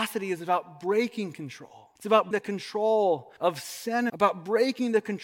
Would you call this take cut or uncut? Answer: cut